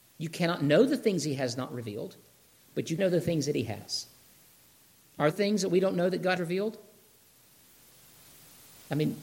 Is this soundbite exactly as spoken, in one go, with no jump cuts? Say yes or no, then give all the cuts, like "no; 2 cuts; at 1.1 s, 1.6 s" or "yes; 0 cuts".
no; 3 cuts; at 3.0 s, 5.3 s, 6.4 s